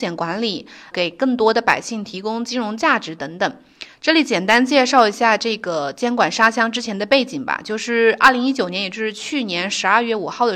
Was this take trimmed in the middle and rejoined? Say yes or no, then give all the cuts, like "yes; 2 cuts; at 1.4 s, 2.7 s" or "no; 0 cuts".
yes; 1 cut; at 0.9 s